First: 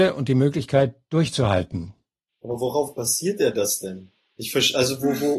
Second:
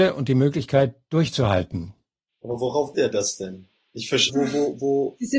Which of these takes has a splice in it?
second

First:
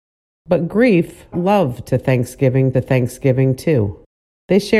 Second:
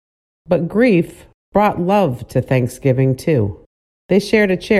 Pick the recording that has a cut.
first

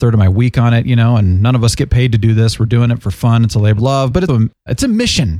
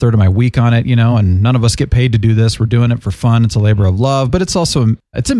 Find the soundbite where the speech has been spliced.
first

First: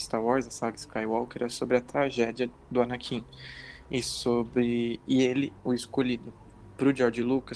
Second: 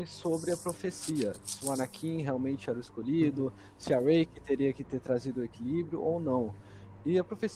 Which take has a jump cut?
first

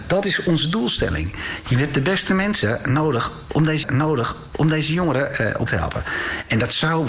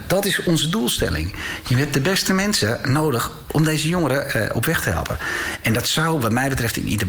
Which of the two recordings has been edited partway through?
first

